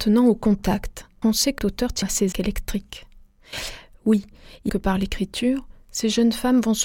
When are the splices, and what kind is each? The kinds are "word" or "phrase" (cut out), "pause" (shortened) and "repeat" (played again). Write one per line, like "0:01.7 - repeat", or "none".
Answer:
0:01.2 - word
0:01.6 - word
0:02.0 - word
0:02.3 - word
0:04.7 - word